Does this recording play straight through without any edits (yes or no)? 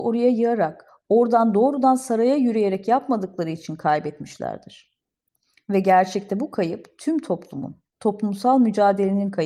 yes